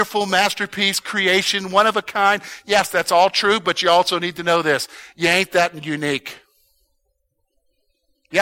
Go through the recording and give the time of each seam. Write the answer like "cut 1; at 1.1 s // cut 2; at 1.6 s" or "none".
none